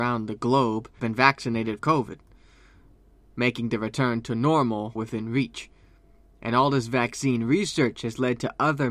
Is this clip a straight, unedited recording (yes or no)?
no